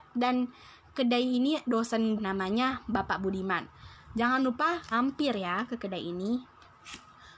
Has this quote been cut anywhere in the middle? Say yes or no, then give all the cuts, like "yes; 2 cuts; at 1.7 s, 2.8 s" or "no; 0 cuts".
yes; 3 cuts; at 1.6 s, 2.2 s, 4.9 s